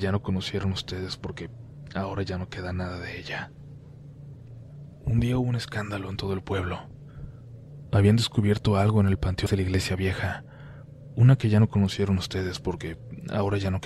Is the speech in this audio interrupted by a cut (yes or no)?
yes